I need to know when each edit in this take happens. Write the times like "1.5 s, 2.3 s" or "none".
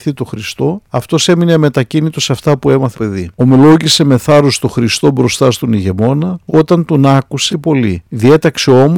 2.9 s, 6.5 s, 7.5 s